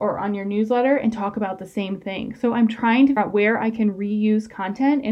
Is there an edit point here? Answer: yes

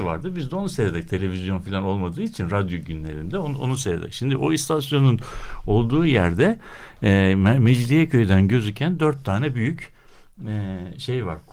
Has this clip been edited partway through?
no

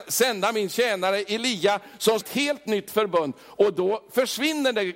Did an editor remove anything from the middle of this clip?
yes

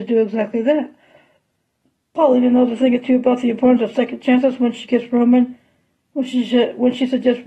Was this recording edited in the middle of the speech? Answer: no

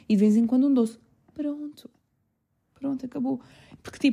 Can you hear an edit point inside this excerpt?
no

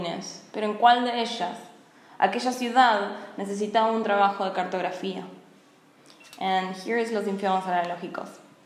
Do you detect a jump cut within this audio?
no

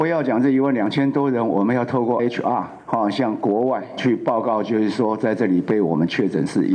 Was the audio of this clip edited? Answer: yes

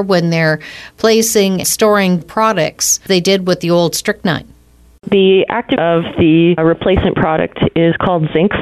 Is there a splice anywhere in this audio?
yes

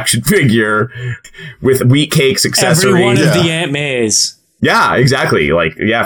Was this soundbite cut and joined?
yes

